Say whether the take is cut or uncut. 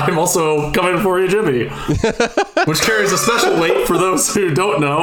uncut